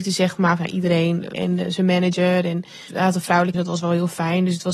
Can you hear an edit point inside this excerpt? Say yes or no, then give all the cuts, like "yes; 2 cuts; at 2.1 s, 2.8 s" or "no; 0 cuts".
yes; 3 cuts; at 1.3 s, 2.9 s, 3.5 s